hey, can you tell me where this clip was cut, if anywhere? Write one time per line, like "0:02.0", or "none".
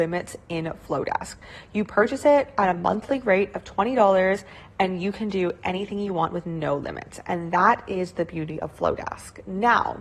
none